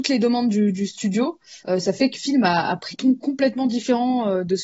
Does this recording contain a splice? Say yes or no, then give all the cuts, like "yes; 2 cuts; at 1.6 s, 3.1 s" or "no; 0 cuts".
yes; 3 cuts; at 1.6 s, 2.1 s, 2.9 s